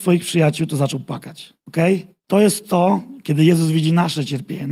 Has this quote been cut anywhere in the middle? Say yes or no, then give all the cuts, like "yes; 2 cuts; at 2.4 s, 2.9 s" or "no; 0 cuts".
no; 0 cuts